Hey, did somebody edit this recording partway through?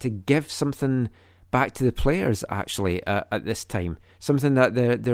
no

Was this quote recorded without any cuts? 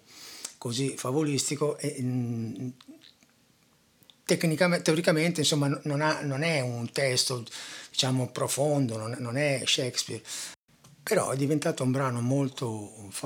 yes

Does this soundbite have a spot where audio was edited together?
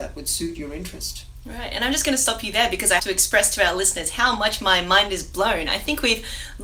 yes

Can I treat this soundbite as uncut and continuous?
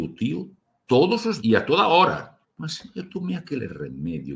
no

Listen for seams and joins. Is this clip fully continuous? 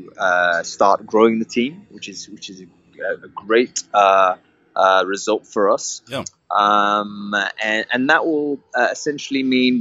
yes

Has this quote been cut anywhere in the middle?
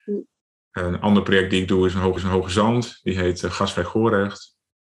yes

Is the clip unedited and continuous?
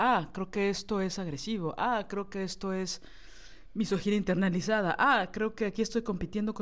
yes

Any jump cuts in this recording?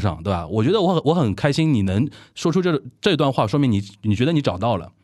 no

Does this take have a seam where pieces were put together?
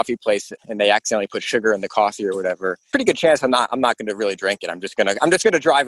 no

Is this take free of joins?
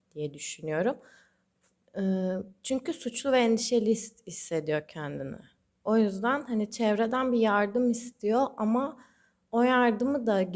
yes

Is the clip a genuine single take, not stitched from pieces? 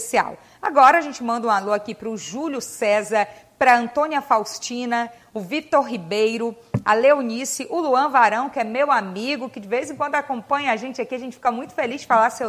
yes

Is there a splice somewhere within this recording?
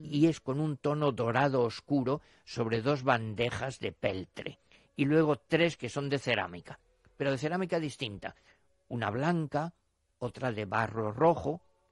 no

